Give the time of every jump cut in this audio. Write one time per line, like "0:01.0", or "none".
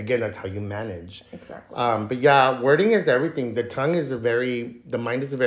none